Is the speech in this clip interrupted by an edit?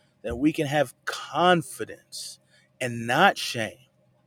no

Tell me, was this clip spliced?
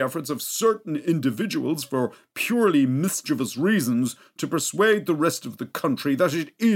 no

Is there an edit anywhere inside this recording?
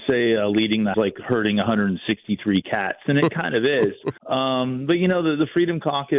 yes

